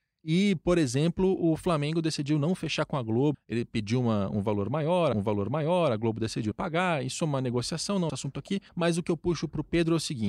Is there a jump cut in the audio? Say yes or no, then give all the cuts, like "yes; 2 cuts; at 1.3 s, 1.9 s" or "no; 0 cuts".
yes; 5 cuts; at 3.3 s, 5.1 s, 6.5 s, 8.1 s, 8.7 s